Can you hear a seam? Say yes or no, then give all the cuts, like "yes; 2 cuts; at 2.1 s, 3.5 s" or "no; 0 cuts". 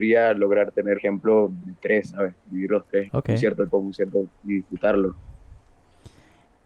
yes; 5 cuts; at 0.9 s, 1.6 s, 2.4 s, 3.1 s, 3.7 s